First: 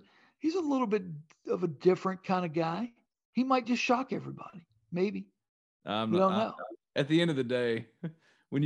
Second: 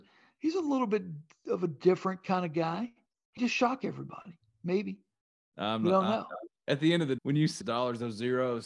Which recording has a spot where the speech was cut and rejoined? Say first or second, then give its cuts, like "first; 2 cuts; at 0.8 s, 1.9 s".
second; 3 cuts; at 3.4 s, 7.2 s, 7.6 s